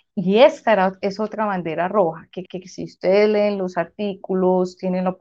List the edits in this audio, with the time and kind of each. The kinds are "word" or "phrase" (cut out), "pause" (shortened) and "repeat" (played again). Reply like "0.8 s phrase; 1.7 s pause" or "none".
2.5 s repeat